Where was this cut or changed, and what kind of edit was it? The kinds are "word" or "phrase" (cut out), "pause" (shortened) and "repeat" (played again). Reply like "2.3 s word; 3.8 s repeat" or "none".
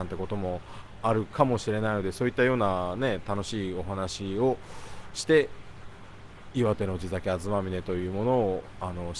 none